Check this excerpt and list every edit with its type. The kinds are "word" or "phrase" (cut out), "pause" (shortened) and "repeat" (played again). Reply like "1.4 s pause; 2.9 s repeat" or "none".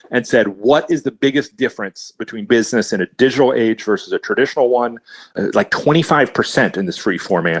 2.5 s word